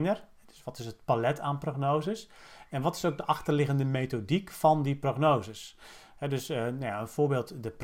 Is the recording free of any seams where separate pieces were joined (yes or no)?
yes